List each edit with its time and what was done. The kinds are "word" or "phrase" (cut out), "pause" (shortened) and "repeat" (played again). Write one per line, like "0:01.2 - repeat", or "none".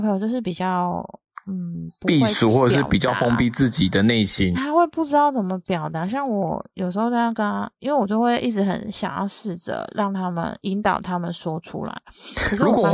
0:04.5 - word